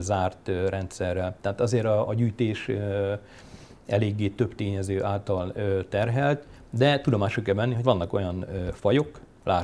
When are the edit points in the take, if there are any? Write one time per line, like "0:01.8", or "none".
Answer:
0:02.1
0:07.8